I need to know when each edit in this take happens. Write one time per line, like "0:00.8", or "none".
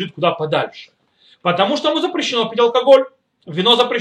none